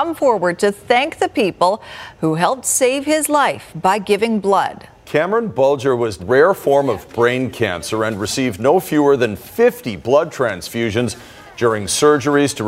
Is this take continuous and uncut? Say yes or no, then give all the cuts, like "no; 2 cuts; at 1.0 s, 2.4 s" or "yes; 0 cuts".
no; 1 cut; at 6.2 s